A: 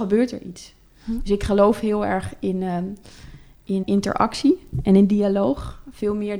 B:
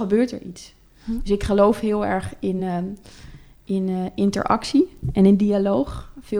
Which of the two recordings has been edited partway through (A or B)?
A